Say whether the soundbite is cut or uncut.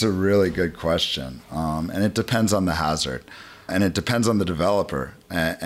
cut